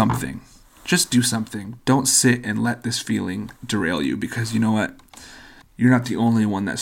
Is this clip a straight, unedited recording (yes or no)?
no